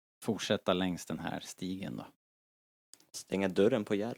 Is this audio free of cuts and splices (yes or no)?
yes